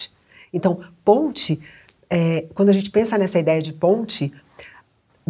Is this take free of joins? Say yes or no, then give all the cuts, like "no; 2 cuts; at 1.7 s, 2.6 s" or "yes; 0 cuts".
yes; 0 cuts